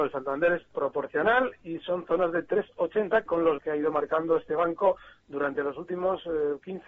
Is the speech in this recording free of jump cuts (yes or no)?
no